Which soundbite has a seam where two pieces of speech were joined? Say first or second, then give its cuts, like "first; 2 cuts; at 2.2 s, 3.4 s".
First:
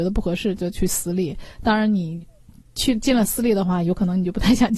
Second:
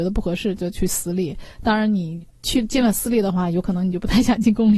second; 1 cut; at 2.3 s